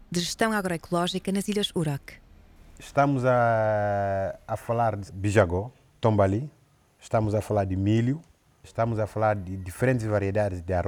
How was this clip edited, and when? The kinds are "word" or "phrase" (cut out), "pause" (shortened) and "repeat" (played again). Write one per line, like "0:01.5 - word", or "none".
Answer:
0:05.1 - phrase
0:06.0 - word